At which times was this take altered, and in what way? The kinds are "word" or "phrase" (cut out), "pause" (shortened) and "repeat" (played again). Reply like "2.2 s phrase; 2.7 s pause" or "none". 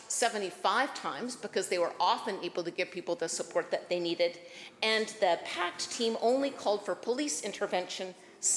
none